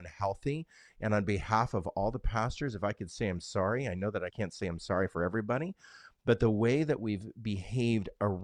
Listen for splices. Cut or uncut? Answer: cut